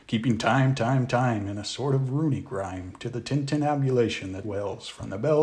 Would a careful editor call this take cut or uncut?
cut